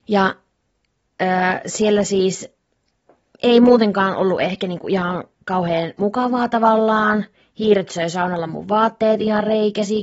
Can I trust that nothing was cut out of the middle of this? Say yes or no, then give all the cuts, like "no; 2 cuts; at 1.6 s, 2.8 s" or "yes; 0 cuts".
yes; 0 cuts